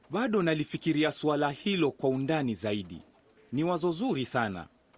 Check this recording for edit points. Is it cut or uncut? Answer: uncut